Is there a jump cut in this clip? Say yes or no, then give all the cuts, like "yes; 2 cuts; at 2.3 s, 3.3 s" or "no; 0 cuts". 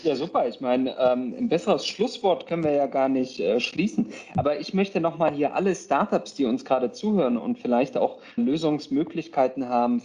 yes; 1 cut; at 8.4 s